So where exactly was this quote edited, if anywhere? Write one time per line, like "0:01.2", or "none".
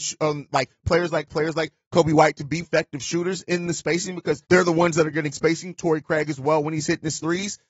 0:01.3
0:02.6
0:04.4
0:05.3

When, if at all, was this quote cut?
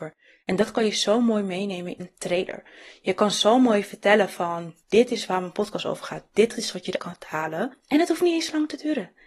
0:02.0
0:04.8
0:07.0

